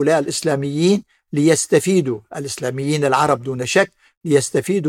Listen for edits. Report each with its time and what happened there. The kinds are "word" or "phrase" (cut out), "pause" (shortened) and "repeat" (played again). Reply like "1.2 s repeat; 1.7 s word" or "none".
none